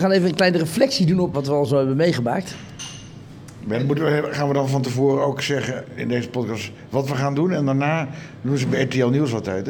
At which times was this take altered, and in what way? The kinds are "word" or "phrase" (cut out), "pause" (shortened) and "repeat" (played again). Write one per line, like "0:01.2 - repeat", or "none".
0:01.3 - word
0:06.0 - word